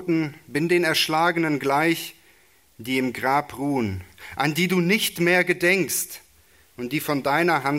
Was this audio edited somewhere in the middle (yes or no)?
no